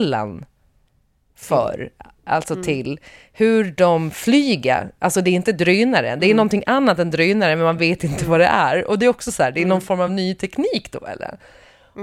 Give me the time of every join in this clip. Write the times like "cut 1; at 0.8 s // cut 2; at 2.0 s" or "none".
none